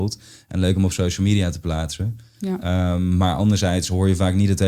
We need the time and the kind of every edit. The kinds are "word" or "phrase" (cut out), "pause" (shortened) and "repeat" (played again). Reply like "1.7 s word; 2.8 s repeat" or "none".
none